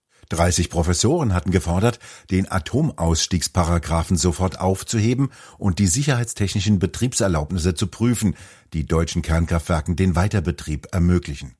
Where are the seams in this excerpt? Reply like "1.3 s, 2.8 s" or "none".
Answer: none